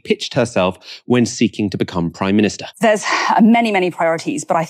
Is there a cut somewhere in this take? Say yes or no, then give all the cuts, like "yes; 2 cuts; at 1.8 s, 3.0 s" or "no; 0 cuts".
yes; 1 cut; at 2.7 s